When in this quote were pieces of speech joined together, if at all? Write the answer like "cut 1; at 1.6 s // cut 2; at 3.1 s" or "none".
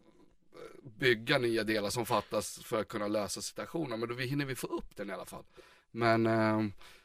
none